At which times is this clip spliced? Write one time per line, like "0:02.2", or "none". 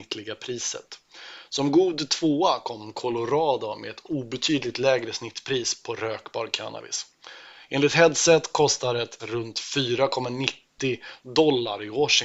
0:09.2